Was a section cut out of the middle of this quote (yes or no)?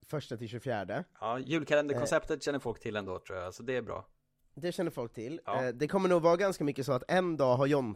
no